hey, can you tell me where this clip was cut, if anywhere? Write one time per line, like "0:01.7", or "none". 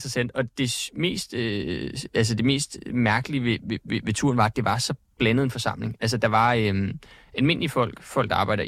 none